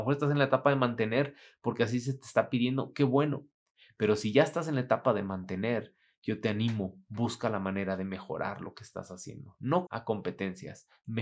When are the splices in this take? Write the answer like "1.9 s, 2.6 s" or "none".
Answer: 9.9 s